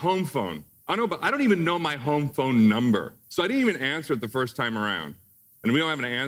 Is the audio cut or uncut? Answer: cut